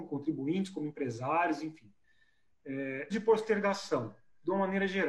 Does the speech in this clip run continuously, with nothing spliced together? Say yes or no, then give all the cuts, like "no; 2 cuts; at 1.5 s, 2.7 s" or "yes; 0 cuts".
no; 1 cut; at 3.1 s